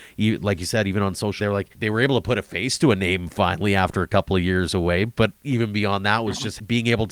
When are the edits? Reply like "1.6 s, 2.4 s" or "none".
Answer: 1.4 s, 1.7 s